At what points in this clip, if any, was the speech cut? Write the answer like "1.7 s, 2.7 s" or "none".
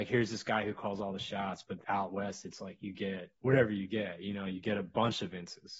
1.8 s, 3.4 s